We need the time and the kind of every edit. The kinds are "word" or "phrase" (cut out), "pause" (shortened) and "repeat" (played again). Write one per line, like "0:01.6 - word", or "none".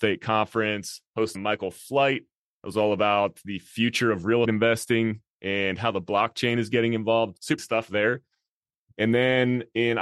0:01.4 - word
0:04.5 - word
0:07.6 - word